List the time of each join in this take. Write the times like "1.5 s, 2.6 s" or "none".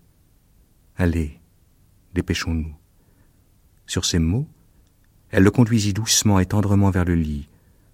none